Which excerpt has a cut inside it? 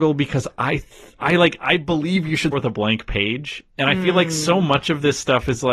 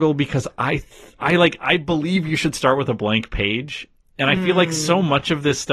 first; 2 cuts; at 2.5 s, 3.7 s

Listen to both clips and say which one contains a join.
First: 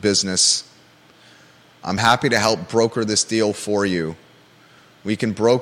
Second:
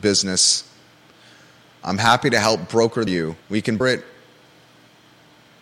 second; 3 cuts; at 3.1 s, 3.4 s, 3.8 s

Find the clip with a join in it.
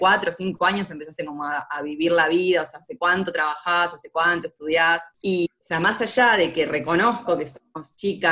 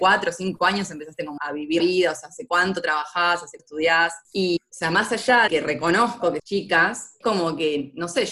second; 6 cuts; at 1.4 s, 1.8 s, 3.6 s, 5.5 s, 6.4 s, 7.2 s

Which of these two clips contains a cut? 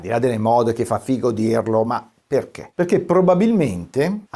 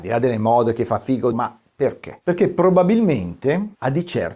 second; 1 cut; at 1.3 s

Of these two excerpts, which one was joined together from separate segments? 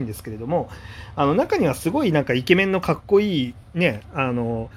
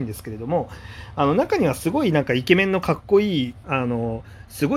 second; 1 cut; at 3.6 s

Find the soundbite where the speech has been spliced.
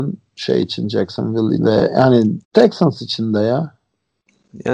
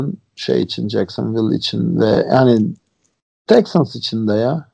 first; 2 cuts; at 1.6 s, 2.4 s

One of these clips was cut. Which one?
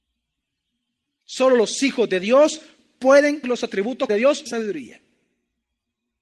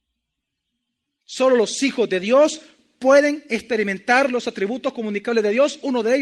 first; 3 cuts; at 3.4 s, 4.1 s, 4.5 s

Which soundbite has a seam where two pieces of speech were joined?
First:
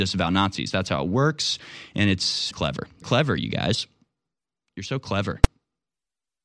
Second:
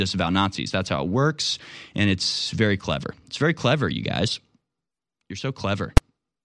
first; 2 cuts; at 2.5 s, 3.0 s

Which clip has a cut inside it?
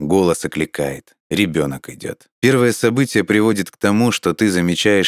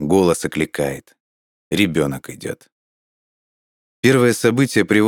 first; 2 cuts; at 1.2 s, 2.4 s

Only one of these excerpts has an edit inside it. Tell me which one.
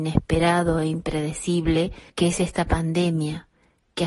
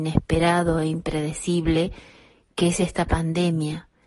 first; 1 cut; at 2.1 s

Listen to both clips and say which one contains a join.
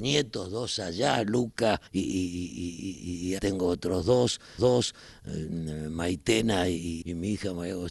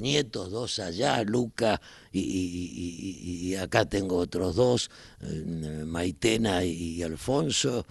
first; 4 cuts; at 1.9 s, 3.4 s, 4.6 s, 7.0 s

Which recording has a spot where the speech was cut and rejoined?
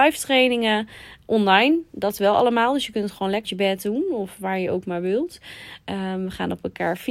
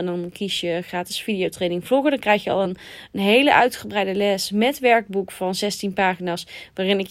first; 1 cut; at 3.4 s

